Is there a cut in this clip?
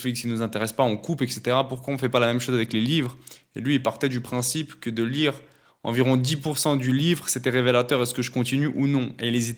no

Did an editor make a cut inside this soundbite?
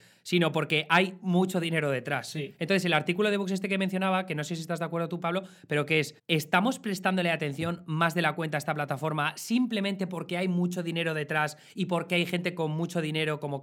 yes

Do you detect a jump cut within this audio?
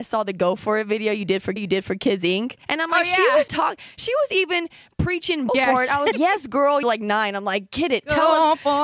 yes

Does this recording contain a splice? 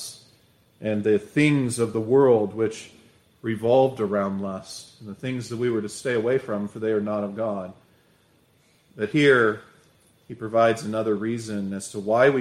no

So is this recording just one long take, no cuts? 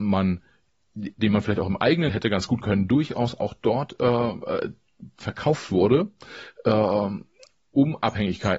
no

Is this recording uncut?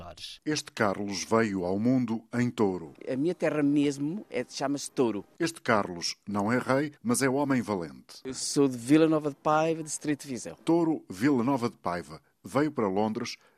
no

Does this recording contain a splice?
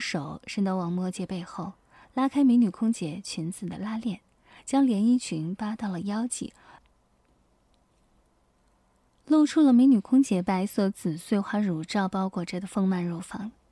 no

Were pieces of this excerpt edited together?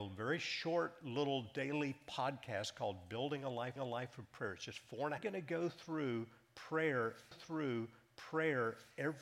yes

